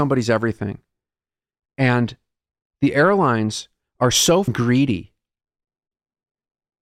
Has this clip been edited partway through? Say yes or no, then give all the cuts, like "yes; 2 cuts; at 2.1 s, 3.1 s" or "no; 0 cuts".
no; 0 cuts